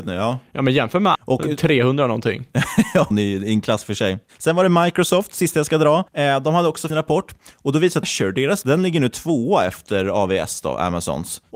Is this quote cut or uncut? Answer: cut